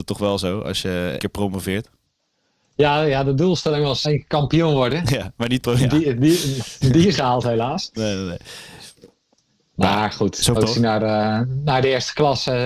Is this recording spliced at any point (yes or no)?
yes